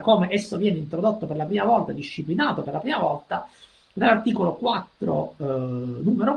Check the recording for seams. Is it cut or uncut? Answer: uncut